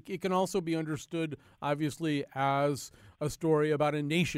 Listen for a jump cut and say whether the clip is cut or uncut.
uncut